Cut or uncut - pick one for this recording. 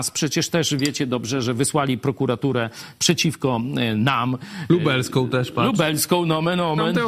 uncut